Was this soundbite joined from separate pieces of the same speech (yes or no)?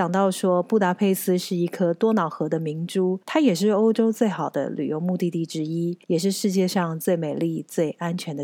yes